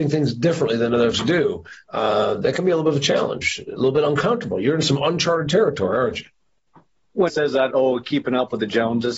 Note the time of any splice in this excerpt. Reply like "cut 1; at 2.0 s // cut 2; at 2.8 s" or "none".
cut 1; at 1.1 s // cut 2; at 7.3 s // cut 3; at 7.7 s